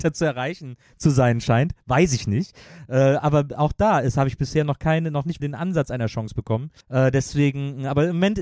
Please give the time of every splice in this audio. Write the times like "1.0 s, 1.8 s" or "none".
5.4 s, 6.8 s